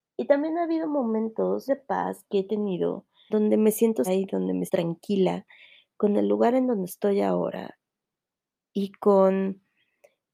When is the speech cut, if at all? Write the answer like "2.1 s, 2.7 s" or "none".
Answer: 1.7 s, 3.3 s, 4.1 s, 4.7 s